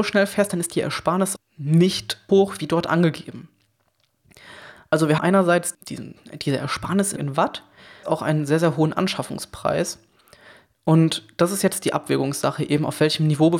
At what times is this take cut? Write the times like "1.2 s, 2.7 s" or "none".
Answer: 1.4 s, 2.3 s, 5.2 s, 5.7 s, 7.2 s, 8.0 s